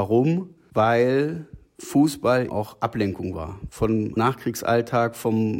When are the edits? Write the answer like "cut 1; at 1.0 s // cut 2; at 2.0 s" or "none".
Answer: cut 1; at 2.5 s // cut 2; at 4.2 s

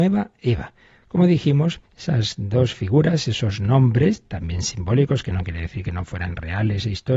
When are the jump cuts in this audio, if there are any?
cut 1; at 1.9 s

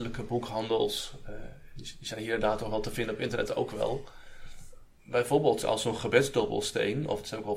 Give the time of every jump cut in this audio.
cut 1; at 5.6 s

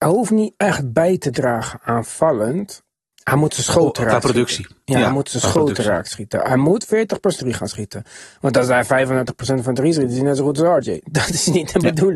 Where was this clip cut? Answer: cut 1; at 3.1 s // cut 2; at 7.4 s

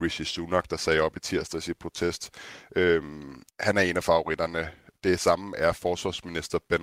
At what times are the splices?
cut 1; at 3.5 s

